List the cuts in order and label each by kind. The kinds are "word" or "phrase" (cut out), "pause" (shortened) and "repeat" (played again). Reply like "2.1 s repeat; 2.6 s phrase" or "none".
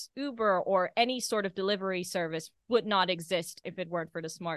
none